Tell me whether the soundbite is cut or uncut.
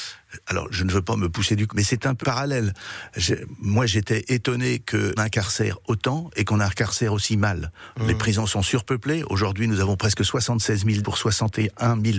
cut